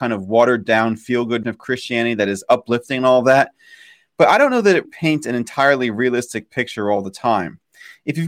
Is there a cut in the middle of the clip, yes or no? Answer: yes